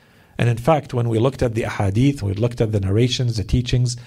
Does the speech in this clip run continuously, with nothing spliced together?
no; 1 cut; at 2.2 s

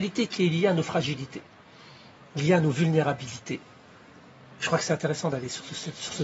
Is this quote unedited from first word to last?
yes; 0 cuts

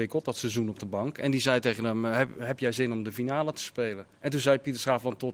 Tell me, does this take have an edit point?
yes; 1 cut; at 4.1 s

